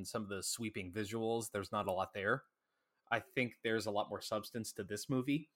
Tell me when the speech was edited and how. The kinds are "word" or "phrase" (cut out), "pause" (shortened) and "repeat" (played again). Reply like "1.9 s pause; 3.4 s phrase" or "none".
none